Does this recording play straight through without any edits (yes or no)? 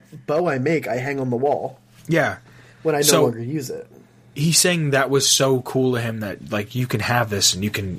yes